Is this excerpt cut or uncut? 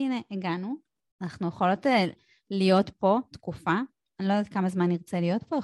uncut